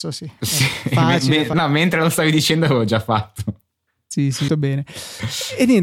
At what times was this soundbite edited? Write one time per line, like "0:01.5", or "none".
0:01.5
0:04.5